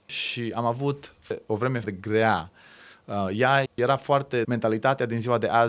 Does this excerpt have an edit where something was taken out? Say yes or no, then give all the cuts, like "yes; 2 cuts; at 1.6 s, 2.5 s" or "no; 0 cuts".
yes; 3 cuts; at 1.8 s, 3.7 s, 4.4 s